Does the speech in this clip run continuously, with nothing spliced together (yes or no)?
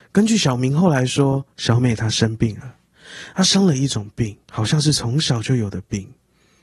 no